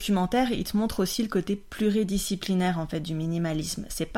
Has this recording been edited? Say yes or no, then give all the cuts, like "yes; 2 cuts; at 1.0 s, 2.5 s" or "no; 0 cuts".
no; 0 cuts